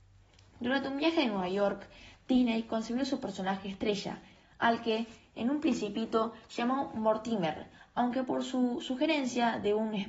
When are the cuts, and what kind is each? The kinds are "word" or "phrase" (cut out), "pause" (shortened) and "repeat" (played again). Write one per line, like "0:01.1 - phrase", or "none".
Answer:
none